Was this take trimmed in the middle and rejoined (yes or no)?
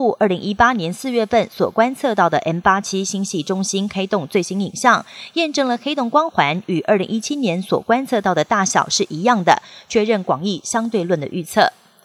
no